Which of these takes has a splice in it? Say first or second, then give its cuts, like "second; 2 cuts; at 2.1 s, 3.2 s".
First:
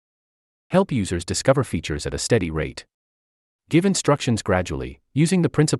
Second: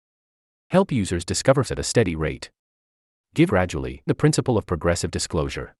second; 3 cuts; at 1.6 s, 3.5 s, 4.1 s